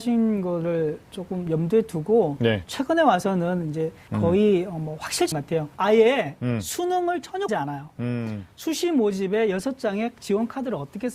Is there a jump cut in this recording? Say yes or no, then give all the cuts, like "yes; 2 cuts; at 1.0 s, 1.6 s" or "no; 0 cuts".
yes; 4 cuts; at 4.1 s, 5.3 s, 5.7 s, 7.5 s